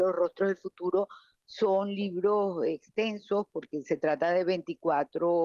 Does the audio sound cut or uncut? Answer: uncut